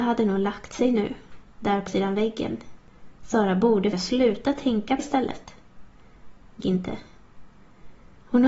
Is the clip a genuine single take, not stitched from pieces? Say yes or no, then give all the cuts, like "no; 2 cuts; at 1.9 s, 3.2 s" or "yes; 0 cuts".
no; 6 cuts; at 1.5 s, 1.9 s, 3.2 s, 3.9 s, 5.0 s, 6.6 s